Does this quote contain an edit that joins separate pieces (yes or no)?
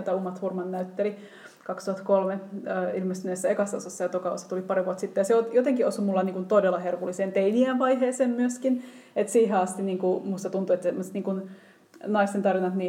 no